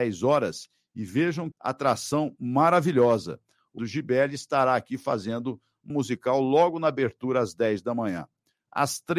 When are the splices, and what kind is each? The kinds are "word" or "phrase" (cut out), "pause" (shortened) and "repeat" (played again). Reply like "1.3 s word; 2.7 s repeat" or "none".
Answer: 1.5 s word; 3.8 s phrase; 5.9 s word